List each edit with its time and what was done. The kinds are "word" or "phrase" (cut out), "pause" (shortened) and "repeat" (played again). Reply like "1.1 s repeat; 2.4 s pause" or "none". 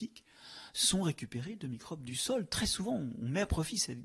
none